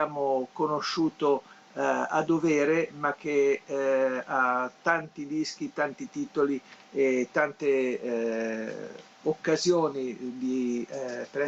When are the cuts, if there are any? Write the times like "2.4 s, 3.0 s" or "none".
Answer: none